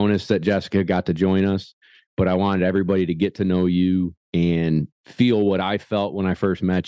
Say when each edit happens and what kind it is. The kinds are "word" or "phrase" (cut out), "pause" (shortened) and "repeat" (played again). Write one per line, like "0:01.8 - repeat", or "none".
0:04.2 - pause